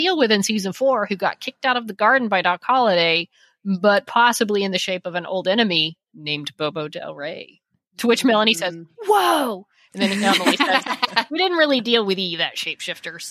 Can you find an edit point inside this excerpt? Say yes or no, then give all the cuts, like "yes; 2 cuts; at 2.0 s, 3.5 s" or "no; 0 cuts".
no; 0 cuts